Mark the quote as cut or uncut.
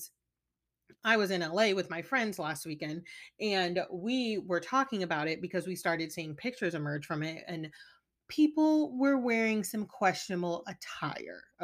uncut